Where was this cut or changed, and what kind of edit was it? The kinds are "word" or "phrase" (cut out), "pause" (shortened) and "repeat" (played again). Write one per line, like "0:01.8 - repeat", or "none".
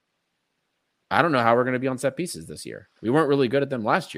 0:03.0 - pause